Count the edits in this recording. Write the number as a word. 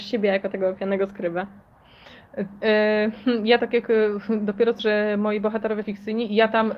three